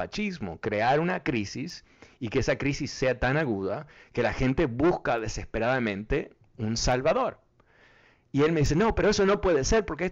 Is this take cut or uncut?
uncut